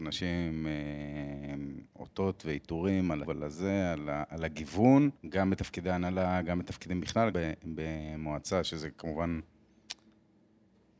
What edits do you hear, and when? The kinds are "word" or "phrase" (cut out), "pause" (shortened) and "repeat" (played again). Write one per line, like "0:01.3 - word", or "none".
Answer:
0:03.2 - word
0:05.2 - pause
0:07.3 - word